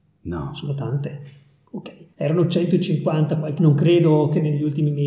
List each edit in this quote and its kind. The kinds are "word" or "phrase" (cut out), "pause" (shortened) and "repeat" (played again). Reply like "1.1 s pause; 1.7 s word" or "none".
2.1 s pause; 3.6 s phrase